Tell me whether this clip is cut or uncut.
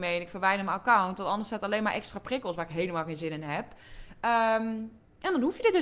uncut